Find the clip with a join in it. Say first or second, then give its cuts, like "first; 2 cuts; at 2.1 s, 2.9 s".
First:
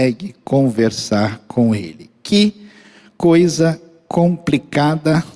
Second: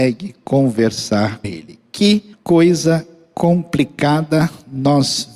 second; 2 cuts; at 1.4 s, 2.3 s